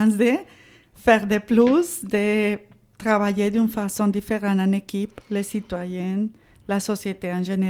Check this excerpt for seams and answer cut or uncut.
uncut